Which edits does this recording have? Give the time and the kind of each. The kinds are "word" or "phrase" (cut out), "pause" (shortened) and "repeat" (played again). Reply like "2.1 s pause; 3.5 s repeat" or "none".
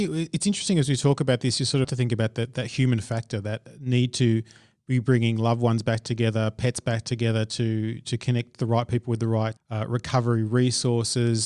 1.8 s phrase